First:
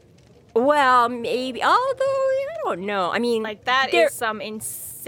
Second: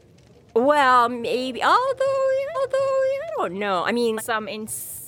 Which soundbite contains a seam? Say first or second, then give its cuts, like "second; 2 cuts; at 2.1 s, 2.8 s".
second; 2 cuts; at 2.5 s, 4.2 s